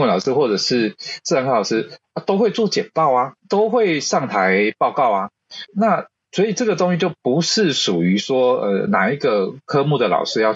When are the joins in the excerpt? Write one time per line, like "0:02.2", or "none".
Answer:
0:03.4